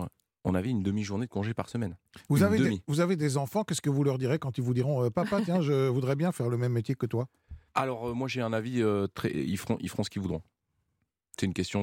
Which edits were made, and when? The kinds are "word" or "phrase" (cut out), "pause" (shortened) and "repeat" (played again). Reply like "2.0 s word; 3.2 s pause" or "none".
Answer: 7.7 s pause